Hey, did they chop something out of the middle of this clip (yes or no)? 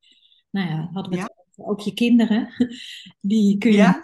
yes